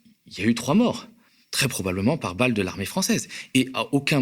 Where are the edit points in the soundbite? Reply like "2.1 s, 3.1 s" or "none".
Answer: 1.3 s